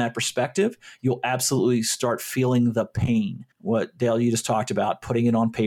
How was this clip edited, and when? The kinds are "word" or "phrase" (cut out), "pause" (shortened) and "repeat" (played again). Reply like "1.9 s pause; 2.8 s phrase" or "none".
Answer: 3.5 s pause